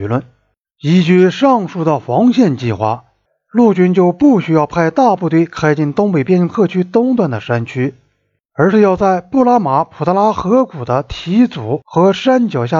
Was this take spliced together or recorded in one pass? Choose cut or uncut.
uncut